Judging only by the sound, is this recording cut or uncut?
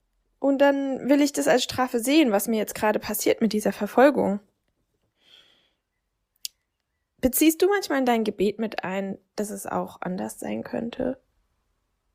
uncut